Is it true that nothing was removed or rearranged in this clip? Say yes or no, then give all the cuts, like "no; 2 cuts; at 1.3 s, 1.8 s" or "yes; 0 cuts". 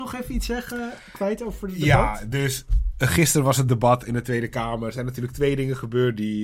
yes; 0 cuts